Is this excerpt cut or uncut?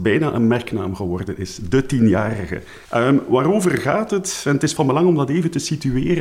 cut